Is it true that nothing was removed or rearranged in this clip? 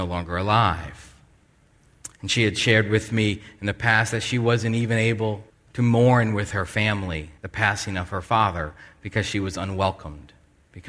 no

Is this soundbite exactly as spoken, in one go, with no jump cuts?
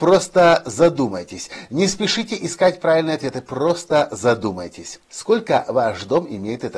no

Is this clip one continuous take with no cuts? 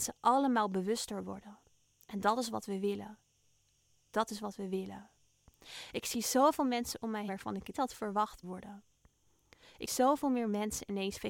no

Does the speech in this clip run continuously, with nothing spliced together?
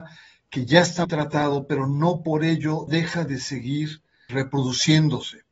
no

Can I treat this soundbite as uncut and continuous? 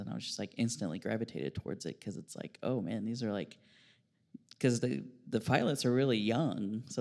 yes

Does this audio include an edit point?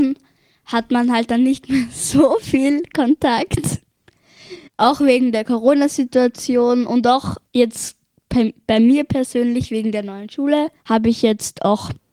yes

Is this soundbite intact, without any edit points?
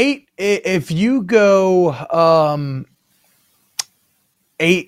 yes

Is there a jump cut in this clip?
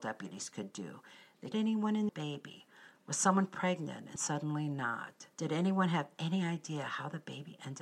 yes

